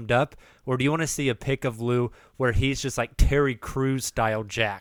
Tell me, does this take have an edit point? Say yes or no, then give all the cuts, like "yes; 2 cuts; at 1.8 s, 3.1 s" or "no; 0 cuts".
no; 0 cuts